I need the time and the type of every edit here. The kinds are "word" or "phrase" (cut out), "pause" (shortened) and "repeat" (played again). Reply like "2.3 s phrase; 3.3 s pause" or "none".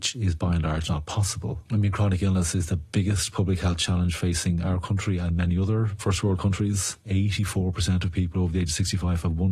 none

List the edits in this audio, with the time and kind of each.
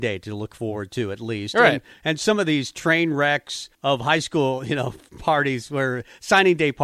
3.7 s pause

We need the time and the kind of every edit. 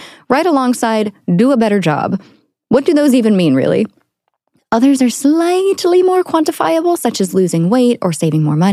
none

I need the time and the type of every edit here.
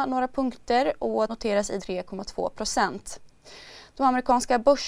1.3 s word; 1.8 s word

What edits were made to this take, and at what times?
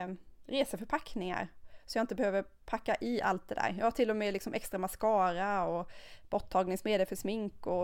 none

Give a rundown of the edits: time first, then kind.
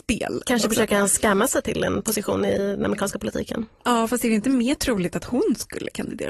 none

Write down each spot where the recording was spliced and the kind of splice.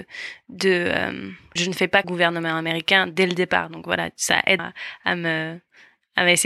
1.6 s word; 2.0 s phrase; 4.6 s word

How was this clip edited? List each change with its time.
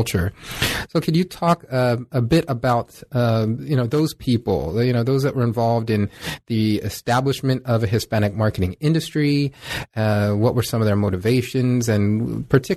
none

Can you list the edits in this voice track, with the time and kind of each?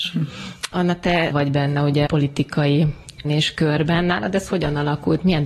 1.3 s phrase; 2.1 s word; 3.2 s word

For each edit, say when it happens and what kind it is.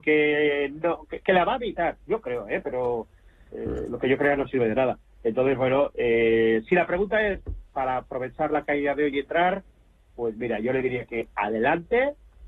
none

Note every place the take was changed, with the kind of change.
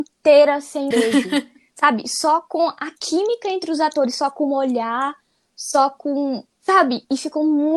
0.9 s word

